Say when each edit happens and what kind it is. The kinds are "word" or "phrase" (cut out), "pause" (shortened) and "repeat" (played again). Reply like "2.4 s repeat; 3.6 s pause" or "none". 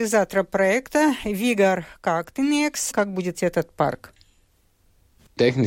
2.9 s word; 3.3 s word